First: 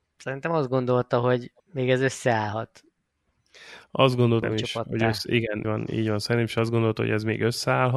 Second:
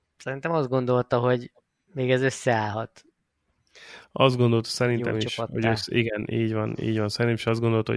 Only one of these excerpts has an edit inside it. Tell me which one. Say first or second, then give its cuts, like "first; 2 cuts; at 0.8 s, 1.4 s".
first; 3 cuts; at 1.6 s, 4.4 s, 5.6 s